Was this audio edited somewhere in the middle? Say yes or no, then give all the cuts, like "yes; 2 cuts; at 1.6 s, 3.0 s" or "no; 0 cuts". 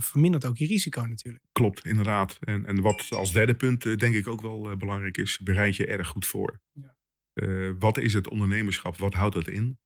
no; 0 cuts